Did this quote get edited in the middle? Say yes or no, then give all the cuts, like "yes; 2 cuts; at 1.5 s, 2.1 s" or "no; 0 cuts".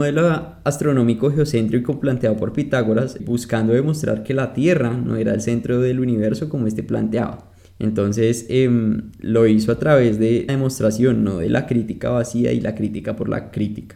yes; 3 cuts; at 3.2 s, 7.6 s, 10.5 s